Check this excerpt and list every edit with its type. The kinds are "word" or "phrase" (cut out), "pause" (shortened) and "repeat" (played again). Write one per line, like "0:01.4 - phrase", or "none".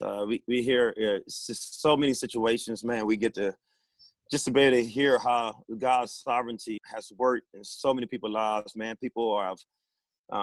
0:06.8 - word